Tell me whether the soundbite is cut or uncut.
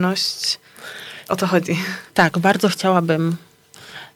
cut